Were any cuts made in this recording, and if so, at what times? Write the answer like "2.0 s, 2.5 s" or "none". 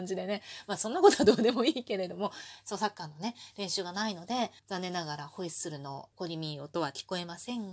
4.6 s, 6.1 s